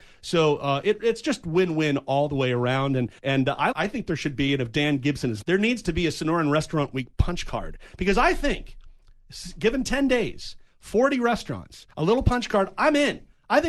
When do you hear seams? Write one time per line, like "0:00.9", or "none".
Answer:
0:03.2
0:03.7
0:05.4
0:11.9